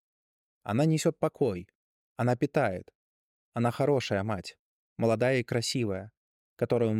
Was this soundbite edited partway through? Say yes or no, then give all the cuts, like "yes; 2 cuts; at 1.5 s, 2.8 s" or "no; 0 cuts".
no; 0 cuts